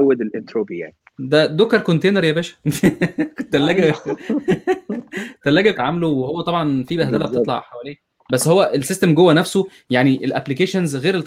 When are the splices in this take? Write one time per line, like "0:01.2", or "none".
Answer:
0:01.0
0:05.7